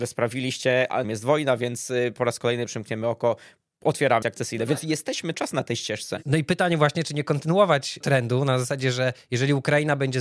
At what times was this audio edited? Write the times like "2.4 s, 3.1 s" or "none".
1.0 s, 4.2 s, 5.3 s, 8.0 s